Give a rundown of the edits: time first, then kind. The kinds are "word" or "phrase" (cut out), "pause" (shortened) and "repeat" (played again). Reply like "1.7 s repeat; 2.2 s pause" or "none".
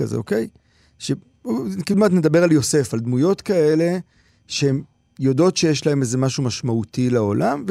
1.9 s word

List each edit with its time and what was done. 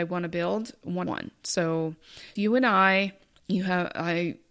1.1 s word; 2.4 s word; 3.3 s pause

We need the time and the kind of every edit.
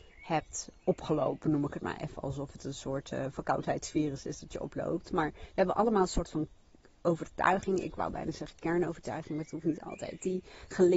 none

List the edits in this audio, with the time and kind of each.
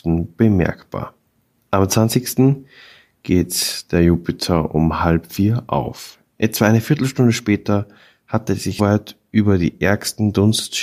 8.8 s word

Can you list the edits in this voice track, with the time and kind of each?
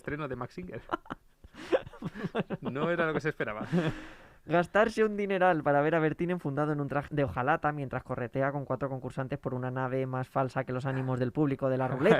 7.1 s word

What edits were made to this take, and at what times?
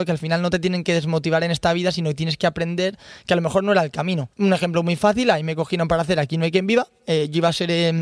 4.3 s pause

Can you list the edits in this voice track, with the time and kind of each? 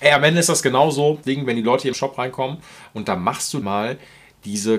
1.2 s word; 1.9 s word; 3.6 s word

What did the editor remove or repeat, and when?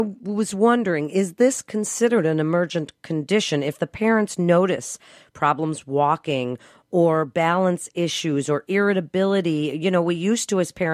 none

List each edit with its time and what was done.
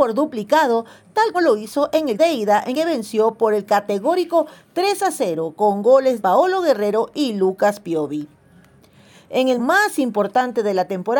1.3 s word; 2.2 s word; 2.7 s word; 6.2 s word; 9.6 s word

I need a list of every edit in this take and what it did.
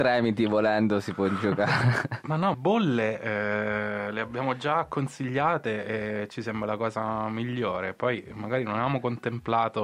2.5 s phrase

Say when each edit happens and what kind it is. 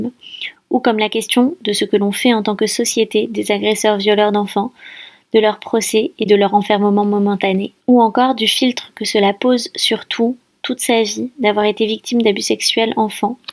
none

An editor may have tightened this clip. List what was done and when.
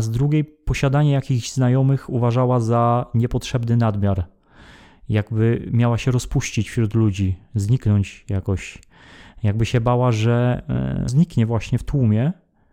11.1 s word

